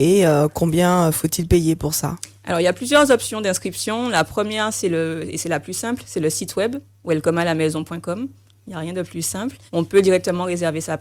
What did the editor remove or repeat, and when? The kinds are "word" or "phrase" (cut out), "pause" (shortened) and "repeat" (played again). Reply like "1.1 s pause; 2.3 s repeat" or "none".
9.7 s pause